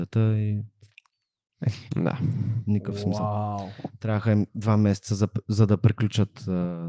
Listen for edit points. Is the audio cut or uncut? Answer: cut